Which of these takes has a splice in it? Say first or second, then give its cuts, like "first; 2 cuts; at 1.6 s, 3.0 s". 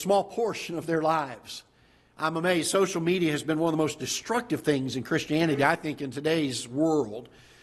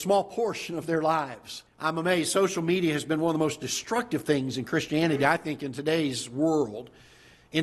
second; 1 cut; at 1.7 s